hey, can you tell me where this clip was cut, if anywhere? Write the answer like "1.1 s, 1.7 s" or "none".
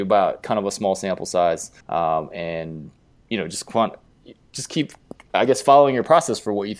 1.8 s